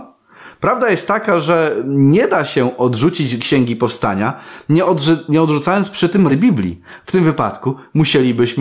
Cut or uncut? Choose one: cut